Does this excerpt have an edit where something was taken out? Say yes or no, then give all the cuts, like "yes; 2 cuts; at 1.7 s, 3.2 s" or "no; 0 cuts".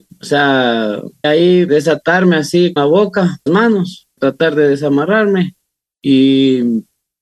yes; 5 cuts; at 1.2 s, 1.7 s, 2.8 s, 3.5 s, 4.2 s